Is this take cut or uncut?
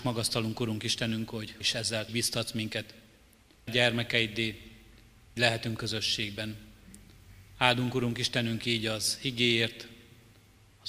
cut